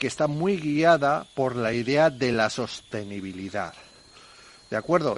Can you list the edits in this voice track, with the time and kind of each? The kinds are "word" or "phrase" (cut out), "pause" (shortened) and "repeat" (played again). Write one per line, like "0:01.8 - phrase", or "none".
none